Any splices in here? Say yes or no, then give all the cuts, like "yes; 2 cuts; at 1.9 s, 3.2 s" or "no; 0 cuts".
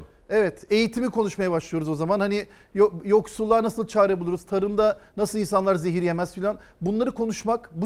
no; 0 cuts